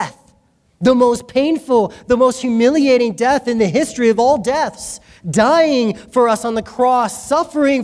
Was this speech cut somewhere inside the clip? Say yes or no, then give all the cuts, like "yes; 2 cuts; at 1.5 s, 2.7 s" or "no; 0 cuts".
no; 0 cuts